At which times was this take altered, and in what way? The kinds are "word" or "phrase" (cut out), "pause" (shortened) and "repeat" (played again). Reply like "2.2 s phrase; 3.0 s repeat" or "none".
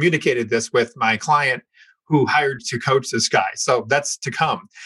2.6 s word